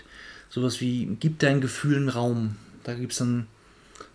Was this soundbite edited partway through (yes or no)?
no